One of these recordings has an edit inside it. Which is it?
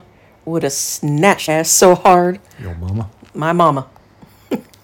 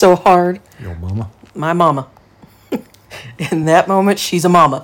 first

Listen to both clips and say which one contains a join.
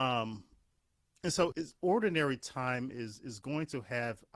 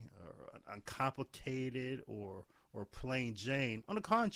first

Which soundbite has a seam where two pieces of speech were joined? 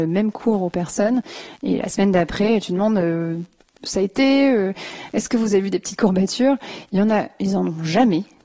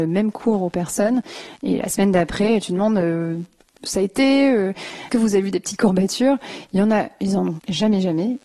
second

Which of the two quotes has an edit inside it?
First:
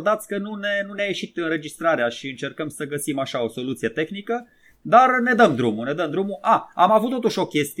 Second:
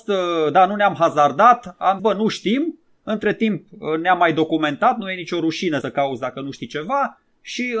second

